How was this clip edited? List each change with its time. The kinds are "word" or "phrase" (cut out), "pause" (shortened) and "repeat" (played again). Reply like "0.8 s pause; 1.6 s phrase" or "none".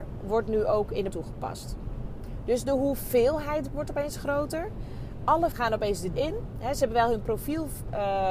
1.1 s word; 3.7 s word; 5.5 s word; 6.2 s word